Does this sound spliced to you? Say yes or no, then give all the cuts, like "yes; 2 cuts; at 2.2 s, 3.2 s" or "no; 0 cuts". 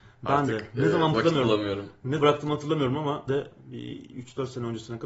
yes; 3 cuts; at 1.1 s, 2.2 s, 3.3 s